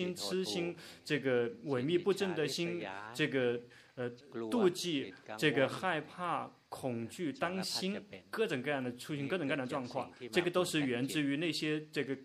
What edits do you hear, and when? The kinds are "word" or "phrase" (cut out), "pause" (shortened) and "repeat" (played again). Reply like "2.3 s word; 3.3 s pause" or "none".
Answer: 4.2 s phrase